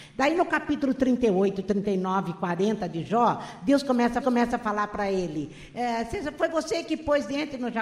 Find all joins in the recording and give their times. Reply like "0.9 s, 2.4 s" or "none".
4.2 s